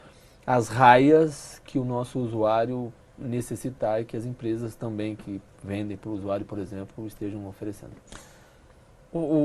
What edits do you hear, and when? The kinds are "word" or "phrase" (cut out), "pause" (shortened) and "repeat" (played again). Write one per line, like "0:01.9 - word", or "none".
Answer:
none